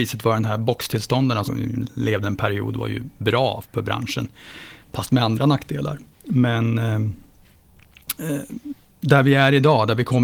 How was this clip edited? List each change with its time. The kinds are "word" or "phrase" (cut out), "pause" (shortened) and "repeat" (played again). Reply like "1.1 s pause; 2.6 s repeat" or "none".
1.5 s word; 2.2 s word; 3.6 s word; 4.8 s pause; 6.1 s pause; 8.8 s pause